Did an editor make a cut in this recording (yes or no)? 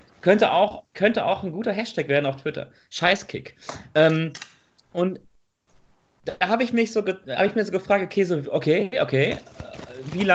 no